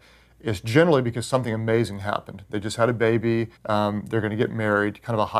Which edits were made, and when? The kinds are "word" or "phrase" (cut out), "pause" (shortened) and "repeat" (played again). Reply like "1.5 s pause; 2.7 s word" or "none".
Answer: 3.6 s pause